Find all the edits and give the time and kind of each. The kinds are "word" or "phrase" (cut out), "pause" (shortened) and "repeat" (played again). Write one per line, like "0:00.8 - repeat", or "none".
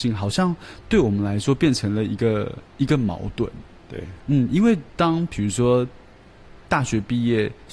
0:02.7 - pause
0:04.9 - pause